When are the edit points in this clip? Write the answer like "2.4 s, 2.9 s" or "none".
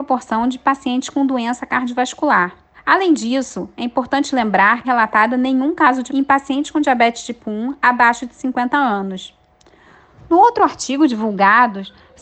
2.7 s, 4.8 s, 6.1 s